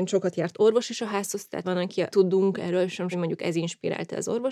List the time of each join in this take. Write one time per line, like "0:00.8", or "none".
0:01.6
0:02.1
0:03.1